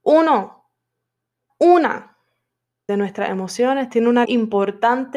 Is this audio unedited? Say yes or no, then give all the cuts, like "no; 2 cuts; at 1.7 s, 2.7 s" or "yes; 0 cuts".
no; 3 cuts; at 1.5 s, 2.9 s, 4.2 s